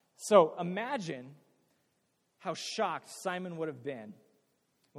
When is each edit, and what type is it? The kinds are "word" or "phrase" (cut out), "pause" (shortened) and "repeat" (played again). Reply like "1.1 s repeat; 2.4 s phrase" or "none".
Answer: none